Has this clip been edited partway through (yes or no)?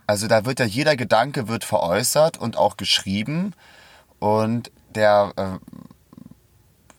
no